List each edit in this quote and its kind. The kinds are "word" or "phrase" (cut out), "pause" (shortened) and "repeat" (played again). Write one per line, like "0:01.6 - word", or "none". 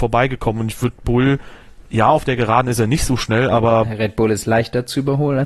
0:01.0 - phrase